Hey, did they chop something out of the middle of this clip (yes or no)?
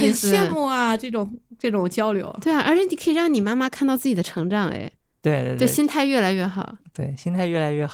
no